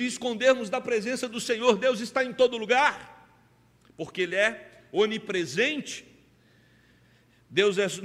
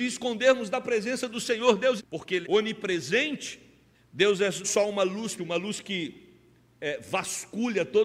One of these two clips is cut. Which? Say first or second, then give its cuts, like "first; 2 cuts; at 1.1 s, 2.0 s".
second; 5 cuts; at 2.0 s, 2.4 s, 3.9 s, 4.6 s, 5.4 s